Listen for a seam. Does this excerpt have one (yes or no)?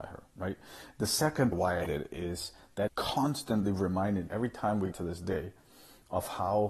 yes